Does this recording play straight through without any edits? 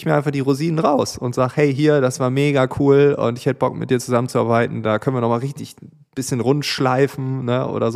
yes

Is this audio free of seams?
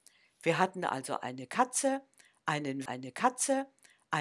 no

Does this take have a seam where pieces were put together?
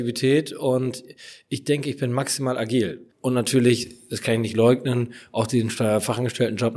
yes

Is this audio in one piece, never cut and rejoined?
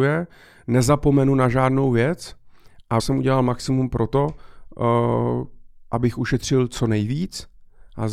no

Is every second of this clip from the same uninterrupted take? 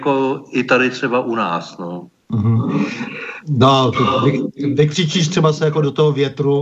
yes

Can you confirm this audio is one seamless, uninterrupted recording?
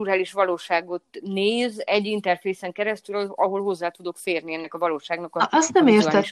yes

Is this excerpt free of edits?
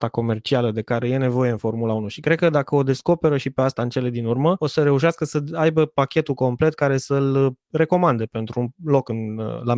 yes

